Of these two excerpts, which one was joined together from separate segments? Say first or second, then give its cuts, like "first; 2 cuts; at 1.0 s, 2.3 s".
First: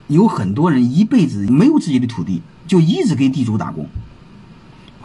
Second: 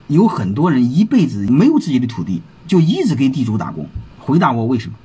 second; 1 cut; at 4.1 s